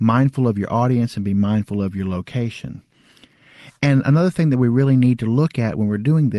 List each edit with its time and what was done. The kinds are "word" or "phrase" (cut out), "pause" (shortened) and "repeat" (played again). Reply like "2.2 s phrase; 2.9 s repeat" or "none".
none